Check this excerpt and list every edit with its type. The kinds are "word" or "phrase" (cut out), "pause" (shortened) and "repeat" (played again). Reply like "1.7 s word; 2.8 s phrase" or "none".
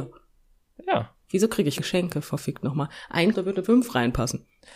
1.8 s word; 3.3 s phrase; 3.6 s word